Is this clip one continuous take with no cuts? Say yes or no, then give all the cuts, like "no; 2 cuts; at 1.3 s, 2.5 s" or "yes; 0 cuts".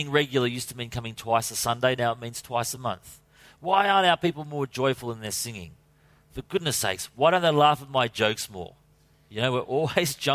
yes; 0 cuts